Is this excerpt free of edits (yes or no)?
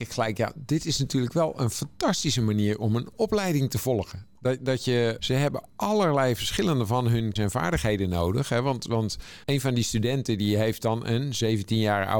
no